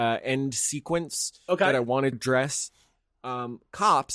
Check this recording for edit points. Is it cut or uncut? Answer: cut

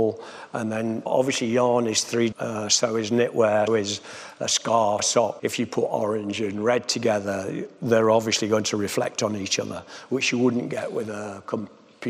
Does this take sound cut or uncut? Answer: cut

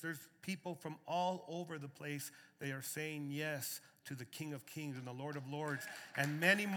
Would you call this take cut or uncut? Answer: uncut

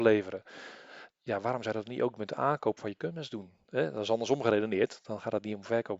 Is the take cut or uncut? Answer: cut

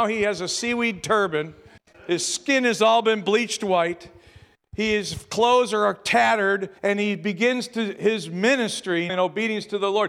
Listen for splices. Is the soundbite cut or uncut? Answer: cut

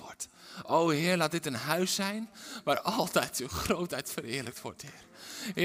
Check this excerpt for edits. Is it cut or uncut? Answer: uncut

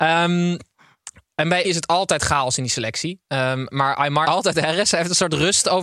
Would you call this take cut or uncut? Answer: cut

